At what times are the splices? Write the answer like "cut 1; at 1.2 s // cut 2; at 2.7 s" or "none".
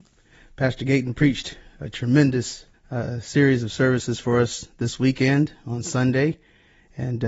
cut 1; at 2.7 s